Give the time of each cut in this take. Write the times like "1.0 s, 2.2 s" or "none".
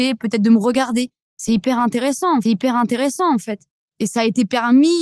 2.4 s